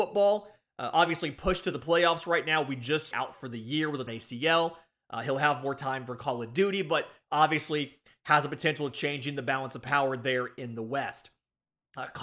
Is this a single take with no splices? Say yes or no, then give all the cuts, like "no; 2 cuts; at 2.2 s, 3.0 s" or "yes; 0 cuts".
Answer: no; 2 cuts; at 3.1 s, 4.1 s